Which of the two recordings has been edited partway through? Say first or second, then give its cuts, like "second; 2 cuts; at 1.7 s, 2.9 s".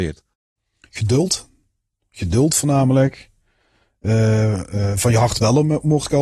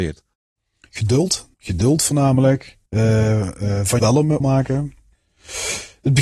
second; 4 cuts; at 1.5 s, 2.9 s, 4.0 s, 4.4 s